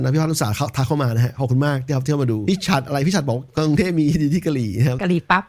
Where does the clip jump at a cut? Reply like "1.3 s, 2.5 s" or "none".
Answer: 3.5 s